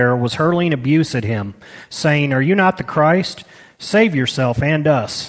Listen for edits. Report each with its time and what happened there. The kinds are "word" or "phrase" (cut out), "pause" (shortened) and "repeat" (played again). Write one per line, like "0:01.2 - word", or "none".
none